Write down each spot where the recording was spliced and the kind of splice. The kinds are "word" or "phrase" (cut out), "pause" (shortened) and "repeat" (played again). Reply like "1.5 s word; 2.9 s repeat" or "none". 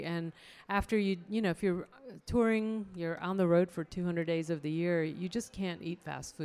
none